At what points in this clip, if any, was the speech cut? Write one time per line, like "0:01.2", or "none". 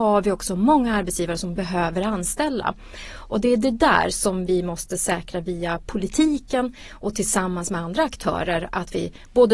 none